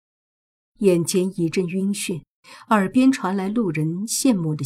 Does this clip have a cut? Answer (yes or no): no